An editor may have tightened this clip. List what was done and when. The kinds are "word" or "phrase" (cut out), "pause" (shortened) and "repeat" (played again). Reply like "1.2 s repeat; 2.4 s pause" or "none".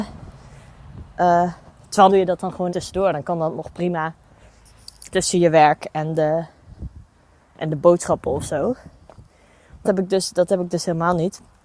2.1 s word; 2.7 s word; 5.1 s word; 9.8 s word